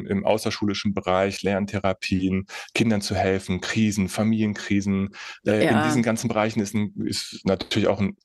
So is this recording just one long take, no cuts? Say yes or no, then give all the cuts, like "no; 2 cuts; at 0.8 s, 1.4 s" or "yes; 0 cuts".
yes; 0 cuts